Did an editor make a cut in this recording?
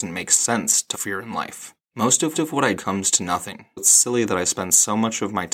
yes; 5 cuts; at 0.9 s, 1.8 s, 2.3 s, 2.8 s, 3.8 s

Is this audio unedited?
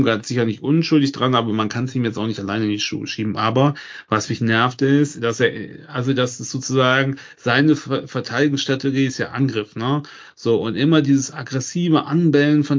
yes; 0 cuts

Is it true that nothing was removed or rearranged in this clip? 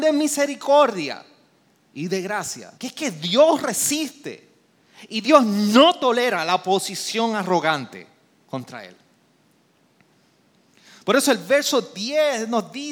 no; 1 cut; at 2.8 s

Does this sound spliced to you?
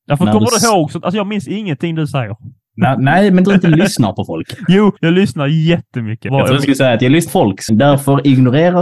yes; 5 cuts; at 3.4 s, 5.0 s, 6.3 s, 7.3 s, 7.7 s

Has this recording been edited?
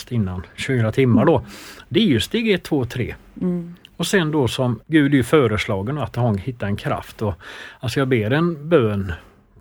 yes; 1 cut; at 4.8 s

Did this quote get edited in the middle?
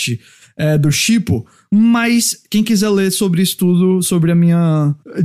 no; 0 cuts

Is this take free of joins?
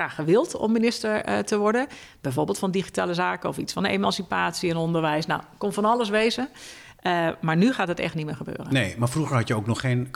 yes; 0 cuts

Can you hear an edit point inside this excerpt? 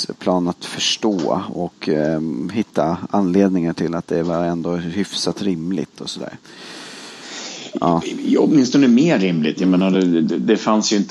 no; 0 cuts

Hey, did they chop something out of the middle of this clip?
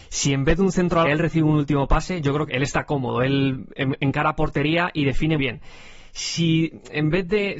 yes; 3 cuts; at 1.0 s, 2.5 s, 5.4 s

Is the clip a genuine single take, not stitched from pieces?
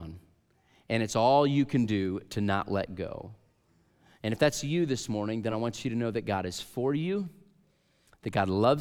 yes; 0 cuts

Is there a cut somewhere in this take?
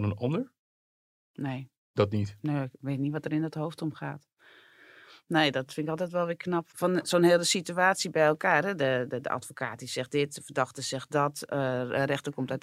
no; 0 cuts

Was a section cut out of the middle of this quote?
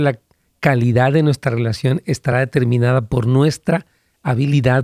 no; 0 cuts

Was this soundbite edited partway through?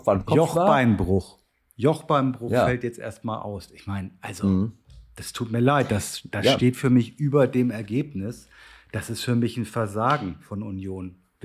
no; 0 cuts

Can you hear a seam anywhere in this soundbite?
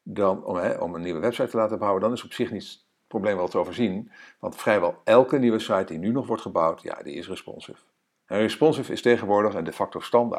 no; 0 cuts

